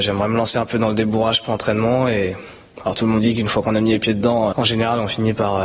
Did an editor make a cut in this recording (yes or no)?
yes